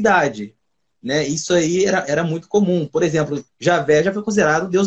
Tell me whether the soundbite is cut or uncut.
cut